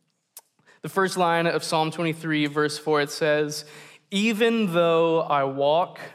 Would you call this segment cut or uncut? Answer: uncut